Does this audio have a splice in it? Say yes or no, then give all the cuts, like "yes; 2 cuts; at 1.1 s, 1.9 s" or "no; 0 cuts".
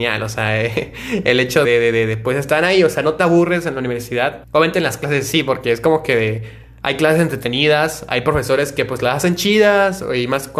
yes; 2 cuts; at 1.6 s, 4.4 s